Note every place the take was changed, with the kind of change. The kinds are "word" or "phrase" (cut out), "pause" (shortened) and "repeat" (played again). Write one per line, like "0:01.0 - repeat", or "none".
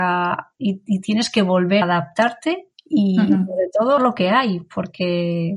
0:01.8 - word
0:02.7 - pause
0:04.0 - word